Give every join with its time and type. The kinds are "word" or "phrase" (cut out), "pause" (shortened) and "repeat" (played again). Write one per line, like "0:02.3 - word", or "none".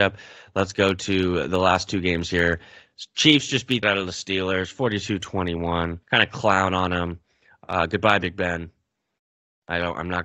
0:03.8 - phrase
0:06.0 - pause